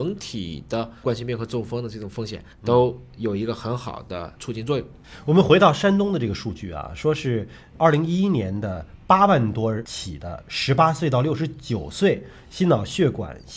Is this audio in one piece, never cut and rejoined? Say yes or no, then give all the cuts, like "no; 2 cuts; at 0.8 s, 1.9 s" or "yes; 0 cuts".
no; 1 cut; at 2.5 s